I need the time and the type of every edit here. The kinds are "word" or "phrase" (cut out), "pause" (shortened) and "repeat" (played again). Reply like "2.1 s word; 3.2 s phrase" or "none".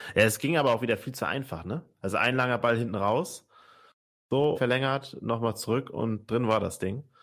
4.5 s phrase

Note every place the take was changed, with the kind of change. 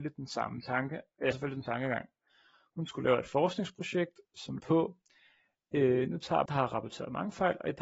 1.3 s word; 1.6 s word; 4.6 s word; 6.5 s phrase

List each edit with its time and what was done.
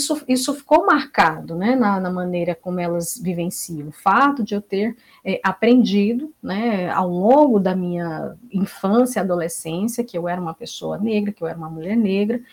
none

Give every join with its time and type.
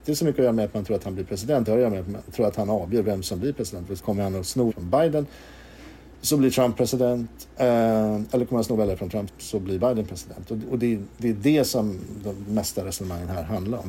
4.0 s word; 4.7 s word; 6.2 s pause; 7.5 s pause; 9.3 s word

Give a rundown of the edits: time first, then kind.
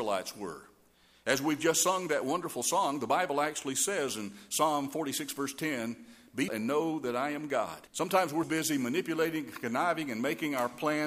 6.5 s word; 7.9 s pause; 8.4 s word

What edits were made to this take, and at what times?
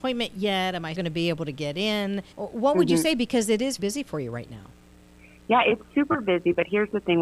0.9 s word; 2.3 s pause; 3.8 s word

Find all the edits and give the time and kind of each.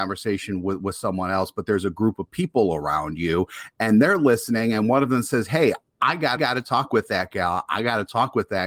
6.4 s repeat

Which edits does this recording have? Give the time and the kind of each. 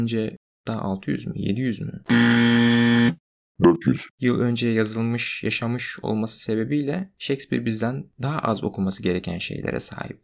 4.1 s pause

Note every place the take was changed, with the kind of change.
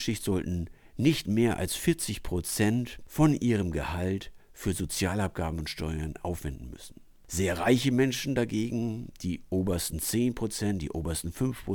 none

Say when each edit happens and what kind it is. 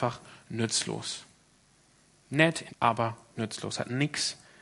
2.7 s word; 3.3 s word

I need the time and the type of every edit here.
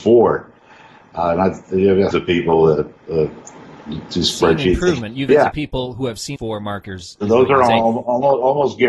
2.1 s word; 5.3 s phrase; 6.4 s phrase

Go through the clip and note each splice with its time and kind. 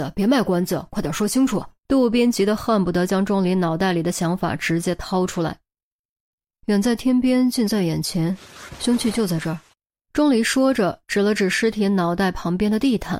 1.8 s pause; 9.7 s pause

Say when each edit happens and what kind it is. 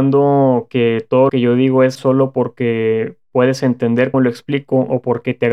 1.3 s word; 2.0 s word; 4.1 s word

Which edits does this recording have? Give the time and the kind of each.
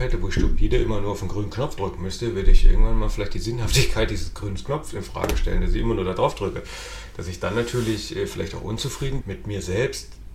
9.2 s word

